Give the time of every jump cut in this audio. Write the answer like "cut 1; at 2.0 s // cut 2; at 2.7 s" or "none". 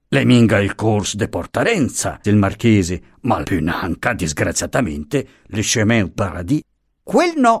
cut 1; at 2.2 s // cut 2; at 3.4 s // cut 3; at 6.1 s